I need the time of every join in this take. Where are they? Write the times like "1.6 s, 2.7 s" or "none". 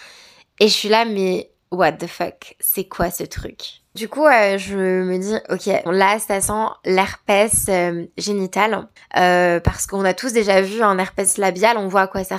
4.0 s, 5.9 s, 9.0 s